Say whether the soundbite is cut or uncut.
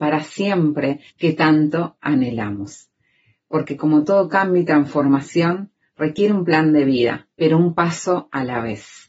cut